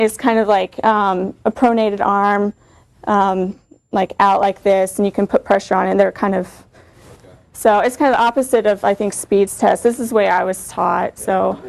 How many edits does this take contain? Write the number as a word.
zero